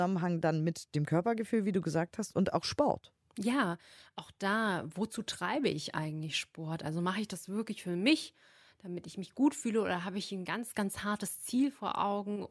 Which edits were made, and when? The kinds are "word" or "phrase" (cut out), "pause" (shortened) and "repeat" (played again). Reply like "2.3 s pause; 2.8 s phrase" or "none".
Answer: none